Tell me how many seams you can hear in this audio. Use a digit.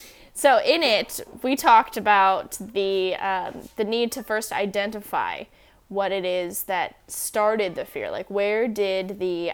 0